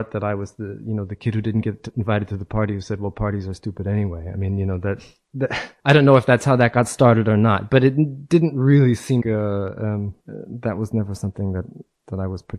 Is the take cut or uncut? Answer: cut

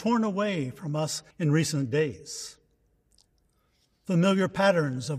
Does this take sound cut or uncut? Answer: cut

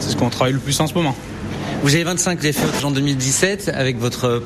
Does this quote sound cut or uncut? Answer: cut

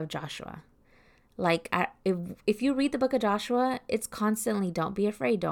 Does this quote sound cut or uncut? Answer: uncut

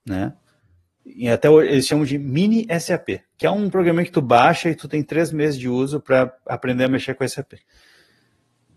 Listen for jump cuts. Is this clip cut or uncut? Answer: uncut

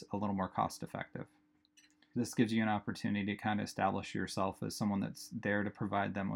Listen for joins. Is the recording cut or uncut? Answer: cut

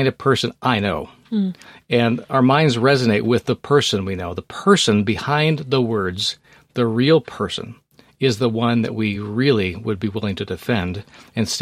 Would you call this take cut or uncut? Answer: uncut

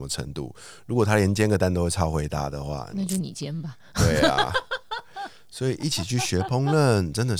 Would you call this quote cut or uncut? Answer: cut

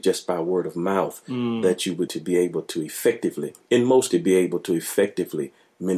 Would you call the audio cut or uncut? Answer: cut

